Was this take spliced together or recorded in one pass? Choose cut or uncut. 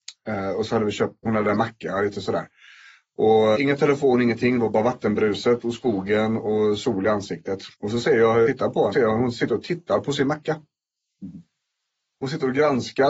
cut